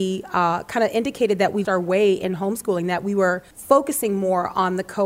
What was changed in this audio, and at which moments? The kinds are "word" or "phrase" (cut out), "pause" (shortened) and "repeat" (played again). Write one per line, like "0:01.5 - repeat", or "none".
0:01.6 - word
0:03.5 - pause